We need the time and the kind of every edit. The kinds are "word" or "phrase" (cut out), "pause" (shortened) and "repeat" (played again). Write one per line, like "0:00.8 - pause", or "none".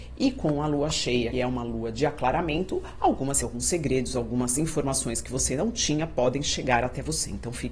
0:01.3 - word
0:03.4 - word